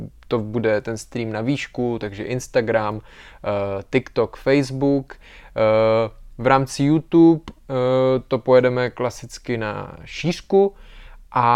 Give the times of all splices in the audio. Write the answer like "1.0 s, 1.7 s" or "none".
none